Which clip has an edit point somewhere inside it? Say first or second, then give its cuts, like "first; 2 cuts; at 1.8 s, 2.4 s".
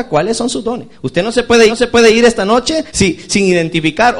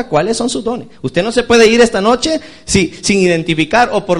first; 2 cuts; at 1.7 s, 2.9 s